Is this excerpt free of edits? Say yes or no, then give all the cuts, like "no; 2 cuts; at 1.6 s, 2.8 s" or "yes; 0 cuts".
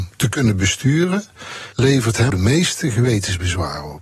no; 2 cuts; at 1.7 s, 2.3 s